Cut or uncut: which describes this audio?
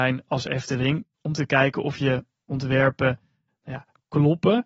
uncut